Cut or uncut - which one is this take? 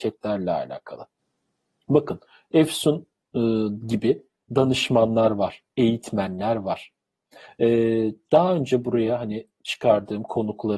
uncut